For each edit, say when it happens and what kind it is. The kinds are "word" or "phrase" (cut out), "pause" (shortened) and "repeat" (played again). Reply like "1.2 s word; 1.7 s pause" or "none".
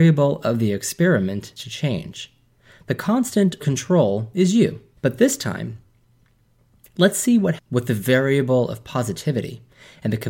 1.6 s word; 3.6 s word; 5.0 s word; 7.6 s word